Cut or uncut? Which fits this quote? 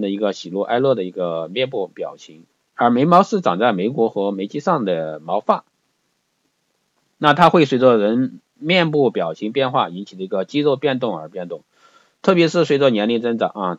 uncut